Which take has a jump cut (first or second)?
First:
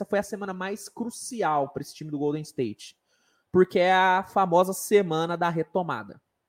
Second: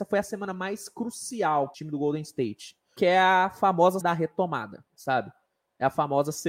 second